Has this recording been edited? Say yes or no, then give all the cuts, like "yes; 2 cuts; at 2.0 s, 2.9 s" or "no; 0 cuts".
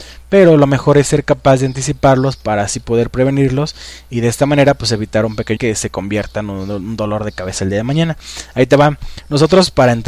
yes; 1 cut; at 5.6 s